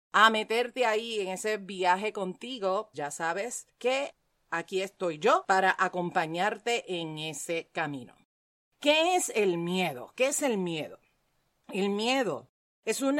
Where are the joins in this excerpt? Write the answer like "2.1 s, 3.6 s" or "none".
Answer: 2.9 s

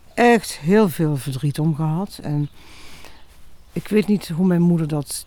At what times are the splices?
none

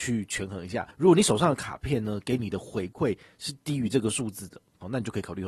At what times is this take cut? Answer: 0.9 s

